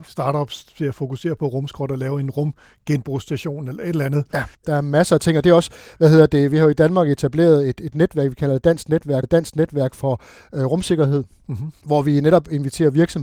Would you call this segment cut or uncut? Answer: cut